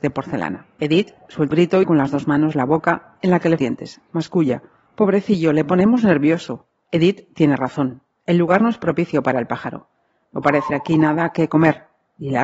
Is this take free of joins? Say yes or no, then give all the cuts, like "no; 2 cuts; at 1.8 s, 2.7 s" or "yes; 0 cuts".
no; 4 cuts; at 1.5 s, 1.8 s, 3.6 s, 10.7 s